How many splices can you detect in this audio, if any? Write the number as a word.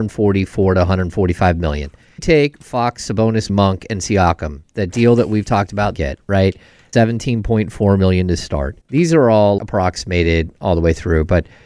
six